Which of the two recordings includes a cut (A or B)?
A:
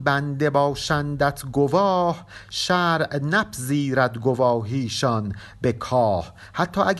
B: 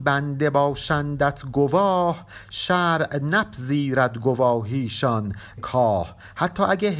B